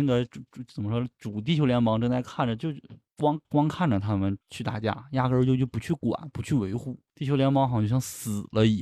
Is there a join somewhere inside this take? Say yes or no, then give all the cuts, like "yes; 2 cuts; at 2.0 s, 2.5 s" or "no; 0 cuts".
yes; 3 cuts; at 3.4 s, 4.4 s, 7.1 s